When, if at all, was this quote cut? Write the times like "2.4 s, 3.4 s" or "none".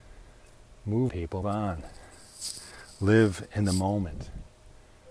1.1 s, 1.4 s